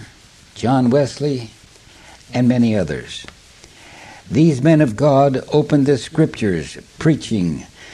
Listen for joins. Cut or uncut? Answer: uncut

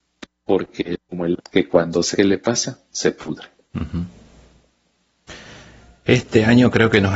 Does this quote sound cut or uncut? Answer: cut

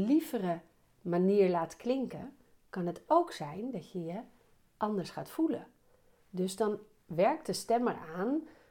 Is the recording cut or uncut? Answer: uncut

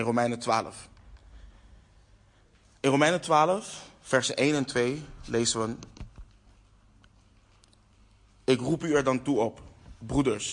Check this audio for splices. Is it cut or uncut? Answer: uncut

